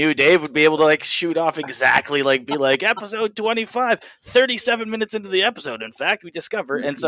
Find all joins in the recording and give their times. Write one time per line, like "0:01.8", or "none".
none